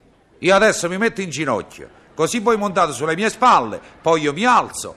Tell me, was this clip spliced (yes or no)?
no